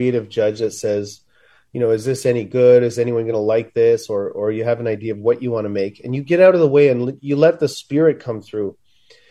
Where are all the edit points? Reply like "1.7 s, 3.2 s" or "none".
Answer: none